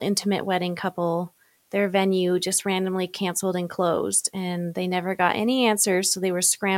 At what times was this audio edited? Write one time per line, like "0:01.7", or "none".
none